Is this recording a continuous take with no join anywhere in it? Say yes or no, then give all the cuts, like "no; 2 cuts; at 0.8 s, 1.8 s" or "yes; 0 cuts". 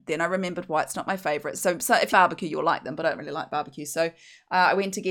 no; 2 cuts; at 2.1 s, 3.2 s